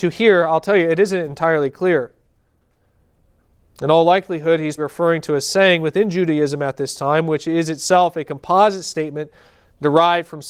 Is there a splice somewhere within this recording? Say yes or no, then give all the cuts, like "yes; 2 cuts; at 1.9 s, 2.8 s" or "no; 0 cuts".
yes; 1 cut; at 4.8 s